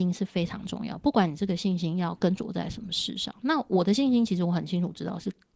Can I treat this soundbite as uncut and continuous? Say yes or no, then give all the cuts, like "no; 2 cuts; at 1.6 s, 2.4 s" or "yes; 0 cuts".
yes; 0 cuts